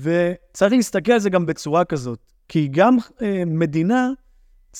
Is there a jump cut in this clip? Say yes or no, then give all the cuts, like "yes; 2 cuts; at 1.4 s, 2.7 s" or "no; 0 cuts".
no; 0 cuts